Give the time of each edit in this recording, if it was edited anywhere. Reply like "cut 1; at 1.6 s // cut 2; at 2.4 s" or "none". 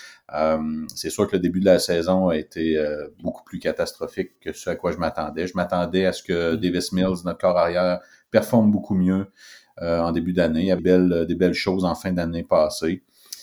cut 1; at 10.8 s